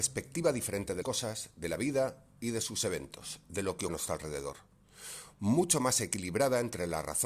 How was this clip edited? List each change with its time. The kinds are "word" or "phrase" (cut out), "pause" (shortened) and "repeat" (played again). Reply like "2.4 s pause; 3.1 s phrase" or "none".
1.0 s word; 3.9 s word